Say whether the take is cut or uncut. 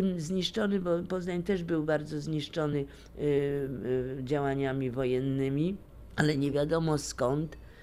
uncut